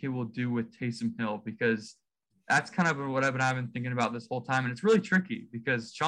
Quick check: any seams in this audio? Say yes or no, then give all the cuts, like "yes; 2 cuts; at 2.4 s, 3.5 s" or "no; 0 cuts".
no; 0 cuts